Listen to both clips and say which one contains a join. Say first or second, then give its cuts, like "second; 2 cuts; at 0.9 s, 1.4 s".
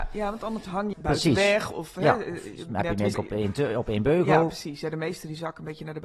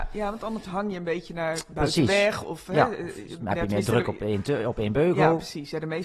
first; 2 cuts; at 0.9 s, 3.1 s